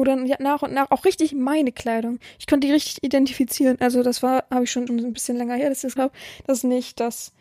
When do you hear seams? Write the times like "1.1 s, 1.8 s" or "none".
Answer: 4.9 s, 6.0 s